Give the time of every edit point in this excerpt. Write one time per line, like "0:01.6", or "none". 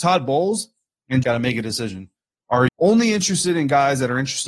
0:01.2
0:02.7